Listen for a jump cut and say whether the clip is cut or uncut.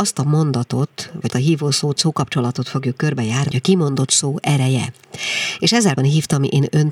cut